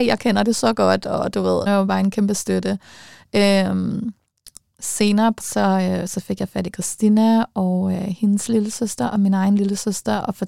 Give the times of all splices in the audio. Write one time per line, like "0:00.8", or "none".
0:01.7
0:05.4